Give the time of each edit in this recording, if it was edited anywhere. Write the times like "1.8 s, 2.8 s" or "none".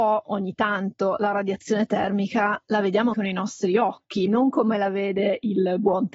3.1 s, 4.3 s

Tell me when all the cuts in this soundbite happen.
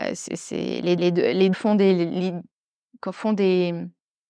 1.0 s, 1.5 s

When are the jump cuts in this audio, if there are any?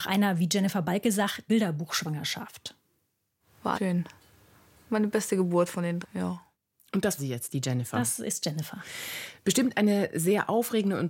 1.5 s, 3.8 s, 6.0 s, 7.2 s

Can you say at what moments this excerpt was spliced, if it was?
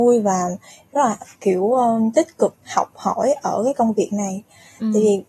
1.3 s, 2.6 s

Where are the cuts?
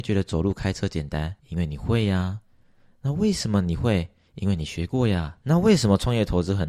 1.4 s, 5.4 s

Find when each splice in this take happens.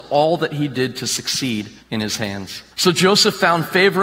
1.8 s, 2.7 s

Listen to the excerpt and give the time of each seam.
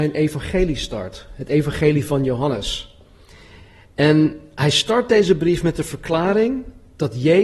none

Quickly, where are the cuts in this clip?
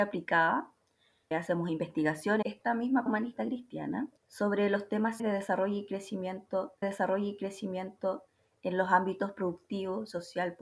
1.3 s, 2.4 s, 3.1 s, 4.2 s, 5.2 s, 6.8 s

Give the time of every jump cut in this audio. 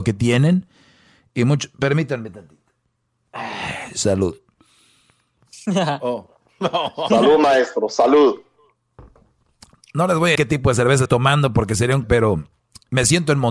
10.4 s, 11.1 s, 12.0 s

